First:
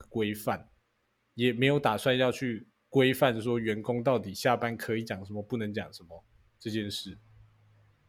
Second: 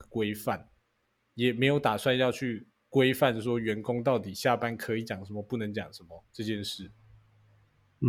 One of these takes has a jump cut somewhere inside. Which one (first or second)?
second